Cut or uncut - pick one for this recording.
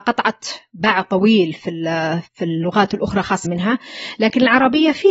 cut